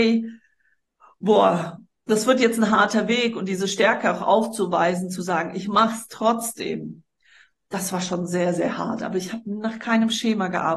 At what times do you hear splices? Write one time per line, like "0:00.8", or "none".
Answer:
none